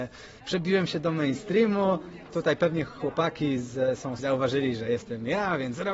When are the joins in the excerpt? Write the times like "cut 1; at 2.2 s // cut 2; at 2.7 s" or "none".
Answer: cut 1; at 4.2 s

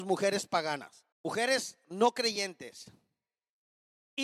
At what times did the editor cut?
cut 1; at 1.1 s

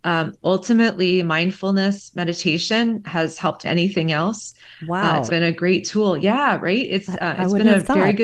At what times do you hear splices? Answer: cut 1; at 3.6 s // cut 2; at 5.3 s

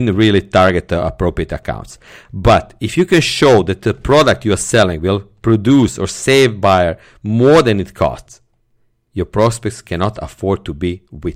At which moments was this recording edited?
none

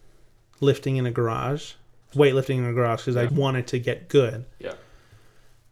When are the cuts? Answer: cut 1; at 2.1 s // cut 2; at 3.3 s

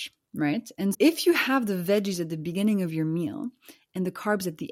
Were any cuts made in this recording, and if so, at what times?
cut 1; at 0.9 s

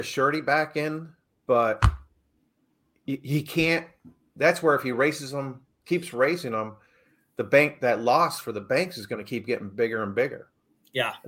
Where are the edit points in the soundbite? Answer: none

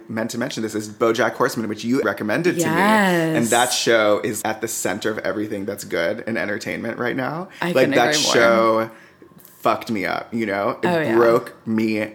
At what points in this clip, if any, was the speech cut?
cut 1; at 2.0 s // cut 2; at 4.4 s

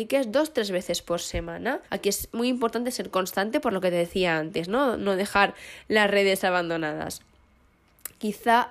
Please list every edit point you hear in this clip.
cut 1; at 1.8 s

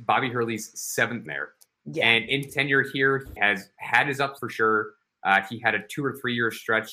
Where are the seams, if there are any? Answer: cut 1; at 1.3 s // cut 2; at 2.5 s // cut 3; at 3.4 s // cut 4; at 4.4 s

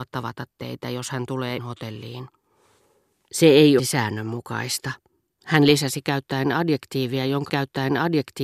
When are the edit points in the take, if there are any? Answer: cut 1; at 1.6 s // cut 2; at 3.8 s // cut 3; at 7.5 s

